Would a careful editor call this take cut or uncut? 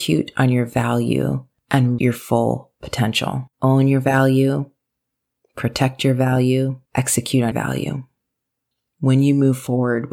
cut